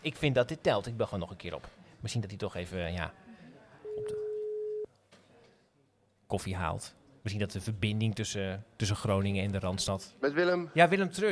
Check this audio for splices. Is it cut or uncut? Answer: uncut